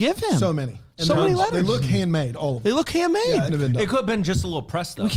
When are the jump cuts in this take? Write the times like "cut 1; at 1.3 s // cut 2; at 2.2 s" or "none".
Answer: cut 1; at 3.5 s